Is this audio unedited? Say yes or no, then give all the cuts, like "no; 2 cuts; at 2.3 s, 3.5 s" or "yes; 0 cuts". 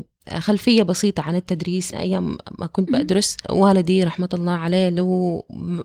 no; 2 cuts; at 1.9 s, 3.4 s